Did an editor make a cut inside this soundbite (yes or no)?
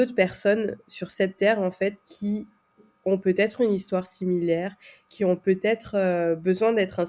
no